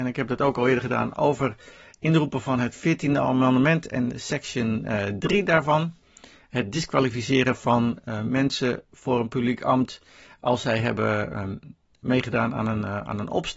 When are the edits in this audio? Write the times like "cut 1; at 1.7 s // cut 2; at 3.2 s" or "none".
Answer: none